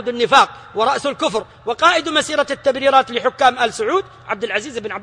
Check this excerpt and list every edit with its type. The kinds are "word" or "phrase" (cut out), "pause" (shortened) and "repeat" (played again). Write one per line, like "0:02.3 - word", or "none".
none